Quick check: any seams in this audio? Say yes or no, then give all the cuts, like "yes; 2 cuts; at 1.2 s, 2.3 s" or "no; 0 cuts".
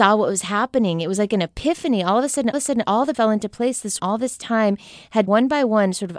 yes; 4 cuts; at 2.5 s, 3.1 s, 4.0 s, 5.3 s